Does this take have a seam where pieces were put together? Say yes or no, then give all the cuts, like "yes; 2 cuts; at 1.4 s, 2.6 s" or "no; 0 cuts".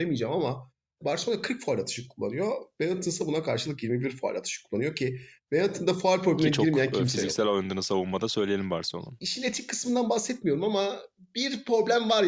no; 0 cuts